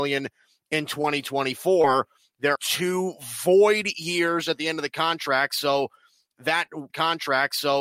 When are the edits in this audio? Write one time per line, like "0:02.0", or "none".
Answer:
0:02.6
0:06.9